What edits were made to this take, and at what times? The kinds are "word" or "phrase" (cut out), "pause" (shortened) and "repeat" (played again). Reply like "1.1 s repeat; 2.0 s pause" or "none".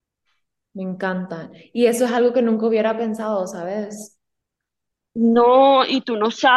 none